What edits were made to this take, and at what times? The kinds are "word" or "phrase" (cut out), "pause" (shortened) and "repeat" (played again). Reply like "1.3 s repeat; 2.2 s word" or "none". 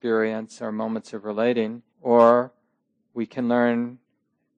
1.9 s pause